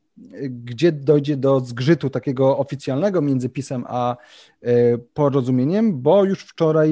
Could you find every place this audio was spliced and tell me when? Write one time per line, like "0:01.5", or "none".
none